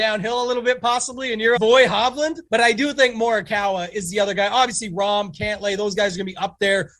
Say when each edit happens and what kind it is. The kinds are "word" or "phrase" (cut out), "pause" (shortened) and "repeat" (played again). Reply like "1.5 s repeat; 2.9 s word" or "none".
1.6 s phrase; 2.5 s pause

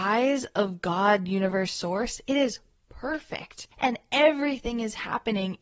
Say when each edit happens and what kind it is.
none

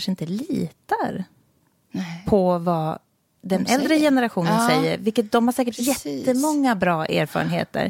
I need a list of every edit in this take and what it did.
none

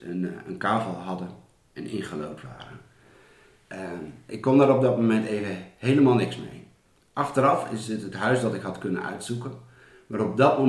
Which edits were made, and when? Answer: none

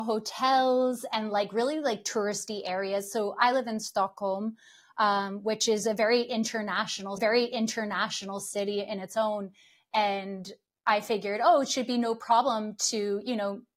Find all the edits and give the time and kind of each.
7.2 s repeat

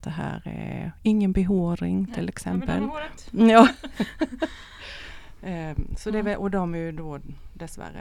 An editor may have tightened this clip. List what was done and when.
none

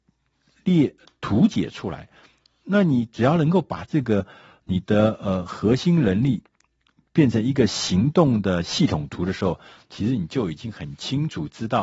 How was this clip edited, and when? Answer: none

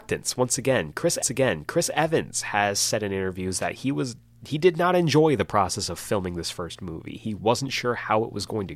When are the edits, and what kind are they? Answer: 1.2 s repeat

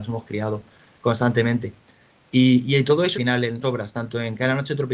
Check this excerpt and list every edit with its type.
3.1 s phrase; 3.6 s phrase

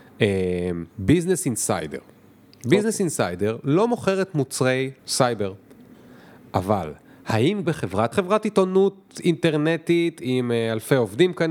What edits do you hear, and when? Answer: 0.9 s pause; 5.0 s pause; 7.6 s word; 8.1 s phrase

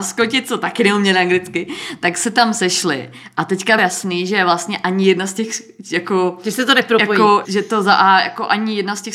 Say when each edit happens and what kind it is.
3.8 s word; 7.4 s word

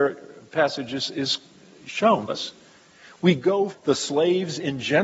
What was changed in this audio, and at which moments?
2.3 s word; 3.7 s word

